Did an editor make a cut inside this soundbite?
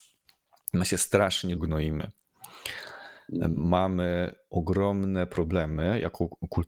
yes; 1 cut; at 1.6 s

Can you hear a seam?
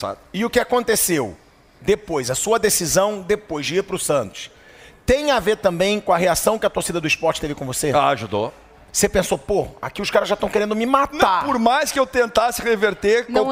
no; 0 cuts

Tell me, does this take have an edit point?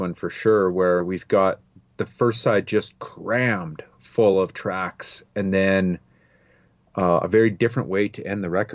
no; 0 cuts

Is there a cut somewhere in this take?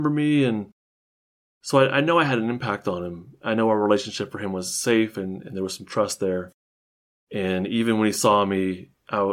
no; 0 cuts

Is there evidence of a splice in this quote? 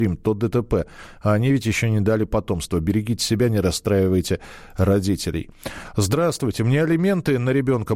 no; 0 cuts

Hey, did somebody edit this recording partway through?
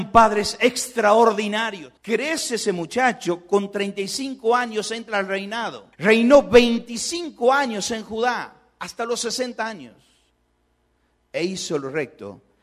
yes; 2 cuts; at 2.0 s, 5.9 s

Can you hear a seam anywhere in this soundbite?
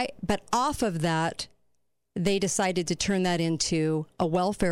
no; 0 cuts

